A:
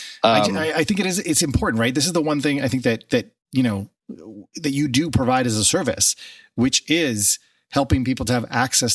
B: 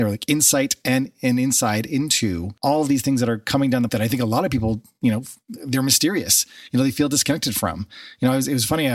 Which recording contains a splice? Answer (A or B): B